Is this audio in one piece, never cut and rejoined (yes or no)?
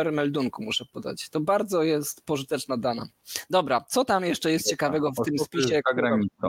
yes